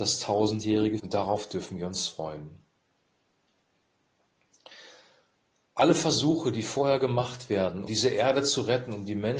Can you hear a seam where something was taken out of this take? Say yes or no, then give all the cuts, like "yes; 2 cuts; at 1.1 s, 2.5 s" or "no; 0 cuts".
yes; 2 cuts; at 1.0 s, 7.9 s